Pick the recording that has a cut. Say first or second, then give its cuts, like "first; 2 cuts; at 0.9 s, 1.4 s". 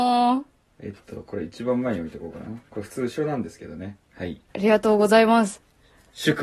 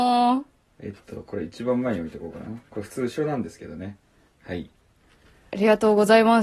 first; 2 cuts; at 4.0 s, 4.5 s